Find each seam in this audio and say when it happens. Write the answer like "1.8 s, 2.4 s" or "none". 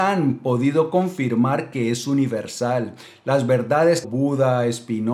4.0 s